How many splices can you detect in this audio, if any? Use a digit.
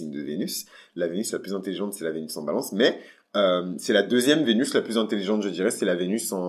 0